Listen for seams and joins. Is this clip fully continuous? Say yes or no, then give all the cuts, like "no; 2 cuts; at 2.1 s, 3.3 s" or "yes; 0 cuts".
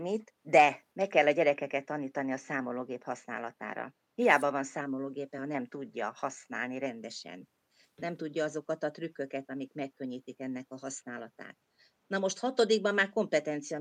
yes; 0 cuts